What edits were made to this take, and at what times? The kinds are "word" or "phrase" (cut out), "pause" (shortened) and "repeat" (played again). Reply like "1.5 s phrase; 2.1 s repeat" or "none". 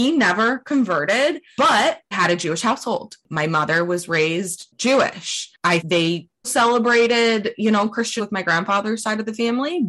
2.1 s word; 5.8 s word; 6.4 s word; 8.2 s word